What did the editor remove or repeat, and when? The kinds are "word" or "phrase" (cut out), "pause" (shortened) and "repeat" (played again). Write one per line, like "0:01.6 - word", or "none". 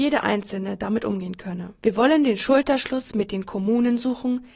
0:01.8 - pause